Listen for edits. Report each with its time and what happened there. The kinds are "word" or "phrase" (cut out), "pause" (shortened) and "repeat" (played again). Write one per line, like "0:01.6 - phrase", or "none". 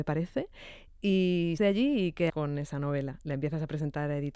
0:01.6 - word
0:02.3 - word